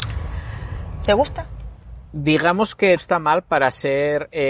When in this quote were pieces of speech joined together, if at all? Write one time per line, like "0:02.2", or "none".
0:02.1
0:03.0